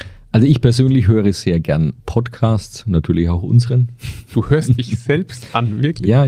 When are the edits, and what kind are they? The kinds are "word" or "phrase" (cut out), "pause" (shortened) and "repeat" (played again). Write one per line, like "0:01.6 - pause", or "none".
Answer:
0:02.0 - pause

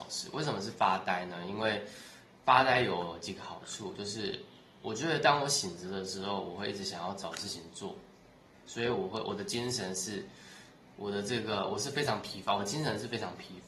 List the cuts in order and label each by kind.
none

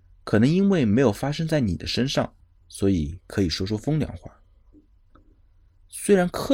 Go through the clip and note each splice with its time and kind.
0:02.4 - pause

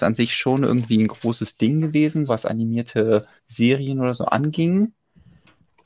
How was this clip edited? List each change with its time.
0:02.3 - word
0:03.4 - pause

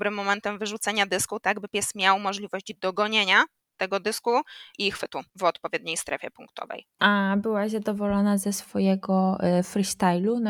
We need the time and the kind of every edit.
none

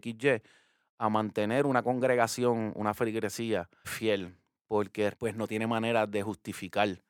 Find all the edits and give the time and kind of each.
0:03.8 - word
0:05.1 - word

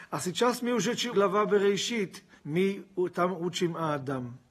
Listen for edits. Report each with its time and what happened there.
0:01.1 - word
0:02.4 - word

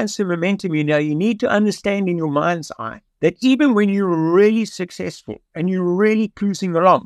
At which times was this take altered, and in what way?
0:03.1 - pause

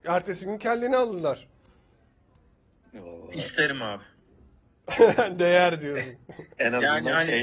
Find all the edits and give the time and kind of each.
none

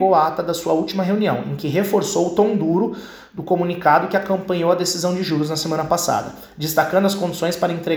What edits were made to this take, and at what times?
none

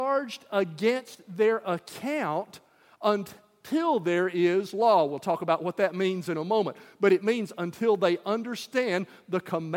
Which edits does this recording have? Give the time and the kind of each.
none

